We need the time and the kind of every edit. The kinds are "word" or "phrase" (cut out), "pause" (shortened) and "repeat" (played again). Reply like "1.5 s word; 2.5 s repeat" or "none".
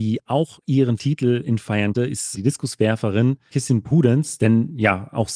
1.0 s word; 1.6 s word; 1.9 s word; 2.3 s word; 3.5 s word

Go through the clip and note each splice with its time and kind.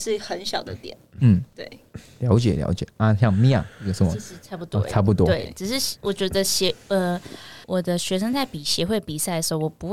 7.6 s pause

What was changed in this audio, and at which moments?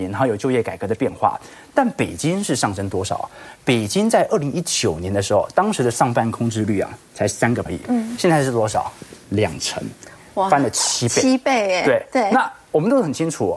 7.7 s word

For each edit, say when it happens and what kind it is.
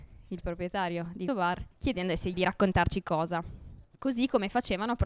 1.3 s word; 1.7 s pause; 2.3 s word; 3.0 s word; 3.9 s pause

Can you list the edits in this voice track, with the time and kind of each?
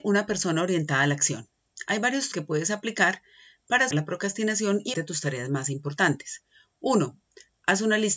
2.3 s word; 3.9 s word; 4.9 s word

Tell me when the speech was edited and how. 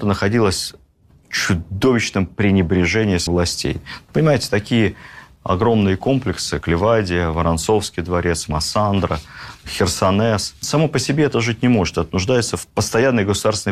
3.3 s word; 6.6 s word

